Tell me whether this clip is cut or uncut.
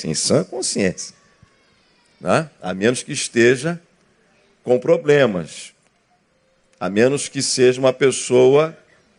uncut